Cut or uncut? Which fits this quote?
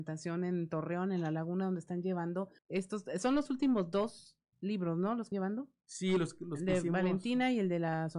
cut